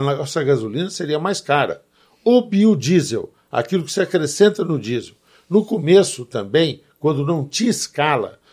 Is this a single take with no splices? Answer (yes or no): yes